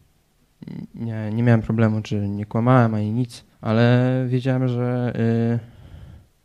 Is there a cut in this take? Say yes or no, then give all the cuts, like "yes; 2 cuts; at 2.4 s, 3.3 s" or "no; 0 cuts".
yes; 1 cut; at 3.5 s